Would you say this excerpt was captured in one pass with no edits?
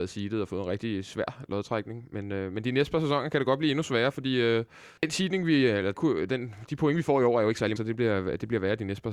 no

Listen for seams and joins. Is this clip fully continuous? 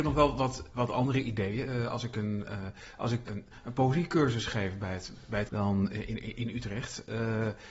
no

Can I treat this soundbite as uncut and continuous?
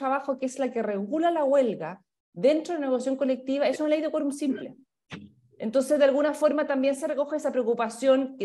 yes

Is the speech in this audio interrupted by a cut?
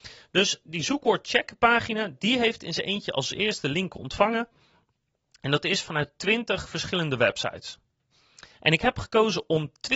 no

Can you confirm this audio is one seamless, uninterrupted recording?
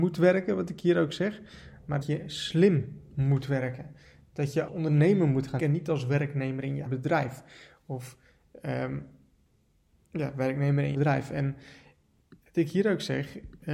no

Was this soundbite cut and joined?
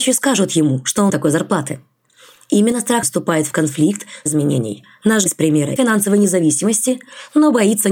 yes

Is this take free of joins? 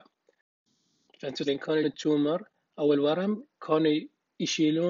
no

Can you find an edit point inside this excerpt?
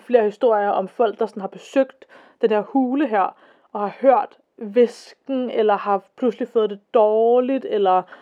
no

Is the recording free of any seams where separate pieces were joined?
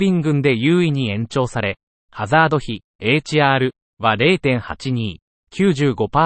yes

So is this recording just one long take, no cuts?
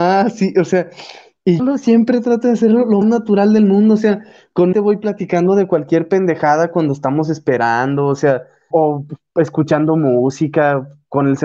no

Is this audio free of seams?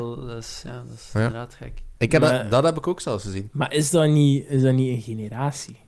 yes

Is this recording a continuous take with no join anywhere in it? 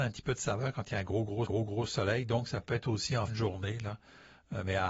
no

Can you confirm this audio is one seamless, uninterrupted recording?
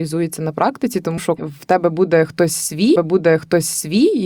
no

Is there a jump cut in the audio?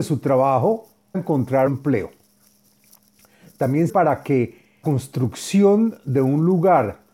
yes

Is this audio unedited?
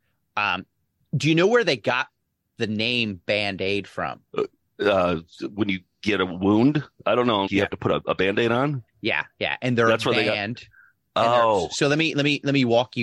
no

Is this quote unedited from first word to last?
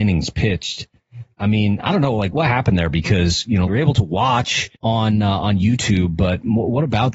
no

